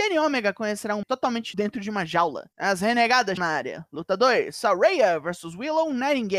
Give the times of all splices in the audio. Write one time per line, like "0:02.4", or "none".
0:01.0
0:01.5
0:02.5
0:03.4